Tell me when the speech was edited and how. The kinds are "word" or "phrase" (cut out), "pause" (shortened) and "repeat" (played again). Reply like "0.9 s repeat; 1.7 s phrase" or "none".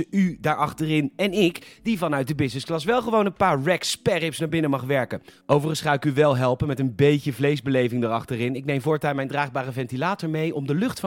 none